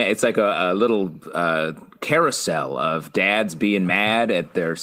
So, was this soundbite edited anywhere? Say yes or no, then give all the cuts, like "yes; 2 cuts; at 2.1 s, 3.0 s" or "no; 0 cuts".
no; 0 cuts